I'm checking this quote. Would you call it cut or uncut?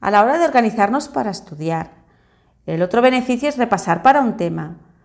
uncut